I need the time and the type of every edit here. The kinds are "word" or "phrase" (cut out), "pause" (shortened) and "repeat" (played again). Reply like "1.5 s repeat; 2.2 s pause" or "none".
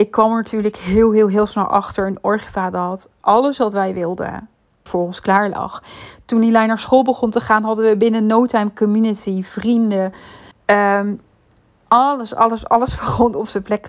4.9 s phrase; 10.5 s pause